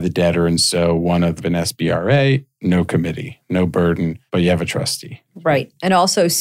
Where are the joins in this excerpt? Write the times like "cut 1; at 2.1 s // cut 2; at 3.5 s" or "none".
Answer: cut 1; at 1.4 s // cut 2; at 4.3 s // cut 3; at 5.3 s